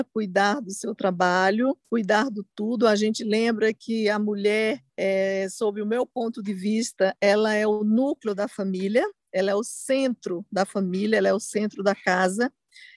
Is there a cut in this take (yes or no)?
yes